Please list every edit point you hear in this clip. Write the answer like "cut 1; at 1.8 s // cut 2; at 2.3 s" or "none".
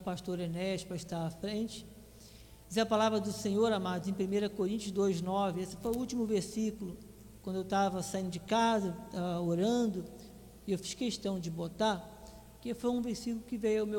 cut 1; at 2.6 s // cut 2; at 12.6 s